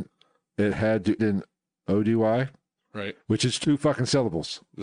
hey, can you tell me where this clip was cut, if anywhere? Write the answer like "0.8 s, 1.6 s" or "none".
1.2 s